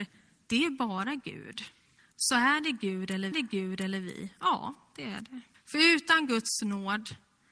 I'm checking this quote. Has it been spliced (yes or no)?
yes